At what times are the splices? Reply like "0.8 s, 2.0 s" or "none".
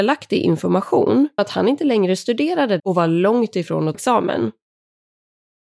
1.4 s, 2.8 s, 3.9 s